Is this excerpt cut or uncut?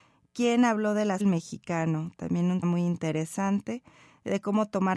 cut